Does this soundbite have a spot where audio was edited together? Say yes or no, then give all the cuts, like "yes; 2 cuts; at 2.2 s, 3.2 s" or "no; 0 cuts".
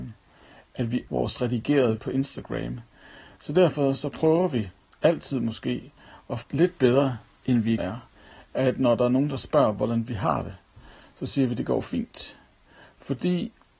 yes; 4 cuts; at 1.1 s, 2.0 s, 6.4 s, 7.8 s